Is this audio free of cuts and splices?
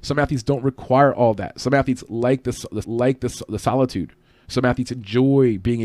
no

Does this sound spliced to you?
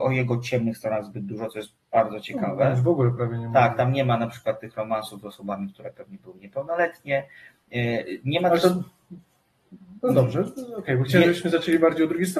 no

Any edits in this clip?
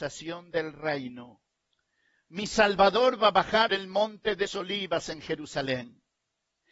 yes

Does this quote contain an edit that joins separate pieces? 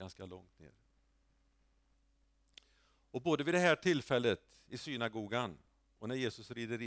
no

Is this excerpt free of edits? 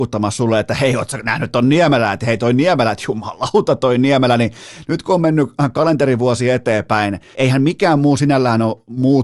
no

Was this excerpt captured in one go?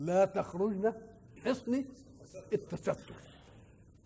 no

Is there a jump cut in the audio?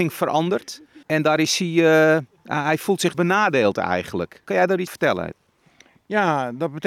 yes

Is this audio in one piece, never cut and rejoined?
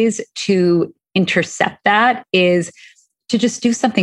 yes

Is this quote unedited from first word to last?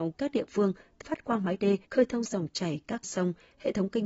no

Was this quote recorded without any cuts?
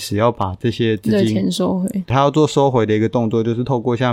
yes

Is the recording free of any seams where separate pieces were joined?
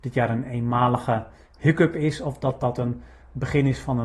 yes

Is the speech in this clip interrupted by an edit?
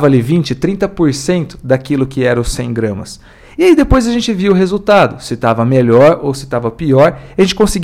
no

